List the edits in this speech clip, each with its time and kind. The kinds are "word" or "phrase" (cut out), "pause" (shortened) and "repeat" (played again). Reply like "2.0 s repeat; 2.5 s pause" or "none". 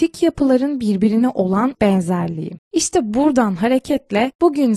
1.8 s word